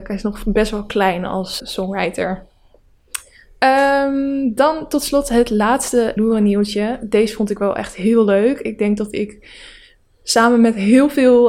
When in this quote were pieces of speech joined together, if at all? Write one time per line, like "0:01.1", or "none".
0:01.6
0:06.2